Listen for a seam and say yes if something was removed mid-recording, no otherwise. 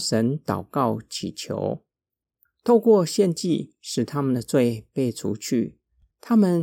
no